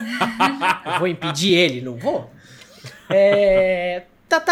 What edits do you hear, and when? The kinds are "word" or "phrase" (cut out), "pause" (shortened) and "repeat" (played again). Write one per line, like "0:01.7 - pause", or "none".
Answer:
none